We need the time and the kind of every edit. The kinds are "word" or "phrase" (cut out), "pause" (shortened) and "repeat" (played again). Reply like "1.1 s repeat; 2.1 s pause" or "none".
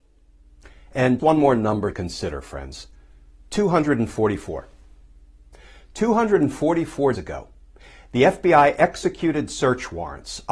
1.2 s word; 1.9 s word; 7.1 s word